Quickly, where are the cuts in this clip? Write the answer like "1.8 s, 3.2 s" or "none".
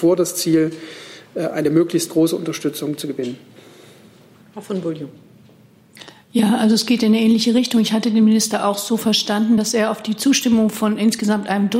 none